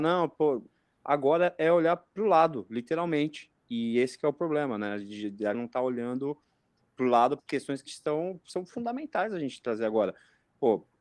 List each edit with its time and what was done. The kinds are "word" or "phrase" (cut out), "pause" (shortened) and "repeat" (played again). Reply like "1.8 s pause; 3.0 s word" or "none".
5.5 s word; 7.4 s word; 7.9 s word